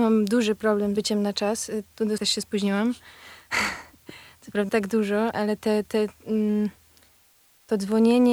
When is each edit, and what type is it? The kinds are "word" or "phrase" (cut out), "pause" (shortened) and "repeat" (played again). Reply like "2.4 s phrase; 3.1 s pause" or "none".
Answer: 1.0 s word; 2.2 s word; 4.7 s word; 5.3 s word